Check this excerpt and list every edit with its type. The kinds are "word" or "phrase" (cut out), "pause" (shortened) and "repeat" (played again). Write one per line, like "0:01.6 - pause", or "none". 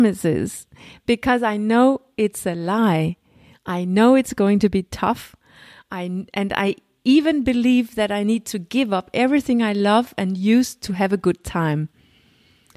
none